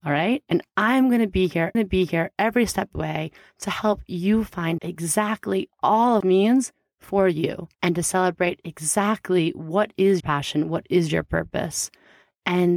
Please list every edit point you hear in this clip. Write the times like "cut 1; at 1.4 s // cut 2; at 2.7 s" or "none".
cut 1; at 1.7 s // cut 2; at 2.9 s // cut 3; at 4.8 s // cut 4; at 6.2 s // cut 5; at 7.7 s // cut 6; at 10.2 s